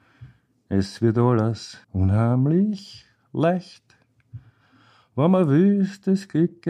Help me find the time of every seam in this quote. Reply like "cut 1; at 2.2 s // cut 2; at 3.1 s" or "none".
cut 1; at 1.8 s